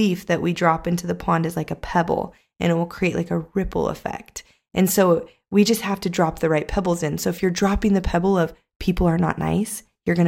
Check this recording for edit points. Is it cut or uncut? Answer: uncut